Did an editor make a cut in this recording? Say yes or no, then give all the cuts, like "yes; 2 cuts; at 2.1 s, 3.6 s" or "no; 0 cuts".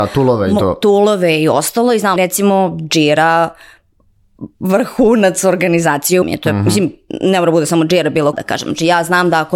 yes; 3 cuts; at 2.2 s, 6.2 s, 8.3 s